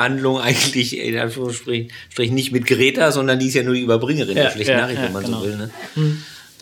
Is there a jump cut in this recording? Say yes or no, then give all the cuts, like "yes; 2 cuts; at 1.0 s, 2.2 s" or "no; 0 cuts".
no; 0 cuts